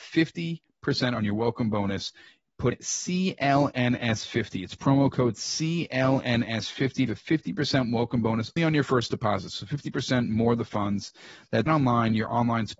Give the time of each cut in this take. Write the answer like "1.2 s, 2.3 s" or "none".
2.7 s, 7.1 s, 8.6 s, 11.7 s